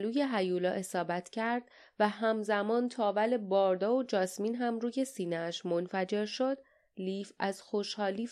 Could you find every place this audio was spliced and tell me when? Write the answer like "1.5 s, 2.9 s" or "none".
none